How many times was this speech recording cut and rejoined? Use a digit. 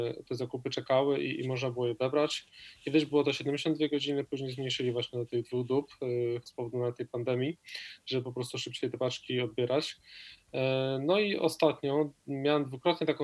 1